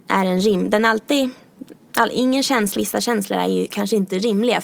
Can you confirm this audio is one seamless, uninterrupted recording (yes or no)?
no